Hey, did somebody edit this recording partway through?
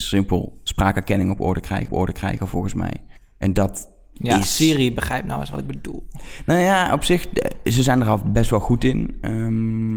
yes; 2 cuts; at 1.9 s, 3.2 s

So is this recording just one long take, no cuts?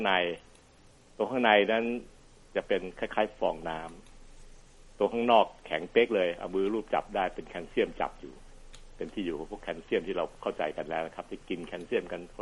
yes; 0 cuts

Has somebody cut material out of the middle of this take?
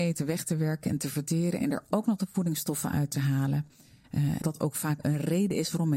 yes; 1 cut; at 4.4 s

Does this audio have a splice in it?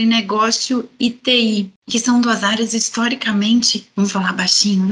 no; 0 cuts

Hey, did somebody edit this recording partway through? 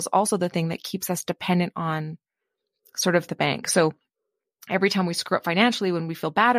yes; 1 cut; at 3.3 s

